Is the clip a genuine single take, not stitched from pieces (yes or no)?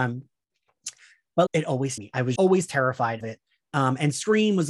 no